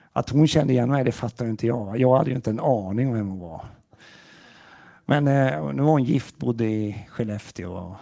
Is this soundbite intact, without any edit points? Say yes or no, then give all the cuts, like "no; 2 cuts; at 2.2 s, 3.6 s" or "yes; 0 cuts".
yes; 0 cuts